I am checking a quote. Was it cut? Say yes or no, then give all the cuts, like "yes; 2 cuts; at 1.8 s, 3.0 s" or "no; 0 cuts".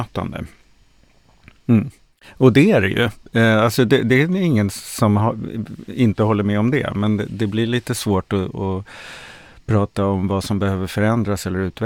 no; 0 cuts